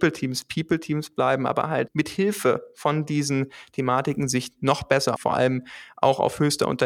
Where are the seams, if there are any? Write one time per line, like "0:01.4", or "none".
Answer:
0:01.9
0:05.2